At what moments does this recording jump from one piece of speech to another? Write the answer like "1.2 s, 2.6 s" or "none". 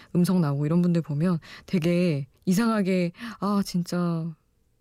2.4 s